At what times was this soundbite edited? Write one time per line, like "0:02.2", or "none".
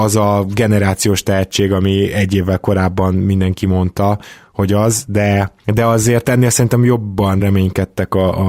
none